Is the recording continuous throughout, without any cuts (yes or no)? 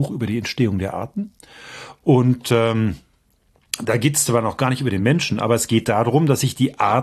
yes